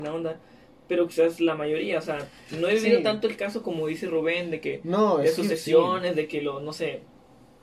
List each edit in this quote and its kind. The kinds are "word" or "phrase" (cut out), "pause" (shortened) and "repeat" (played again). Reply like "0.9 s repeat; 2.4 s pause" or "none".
none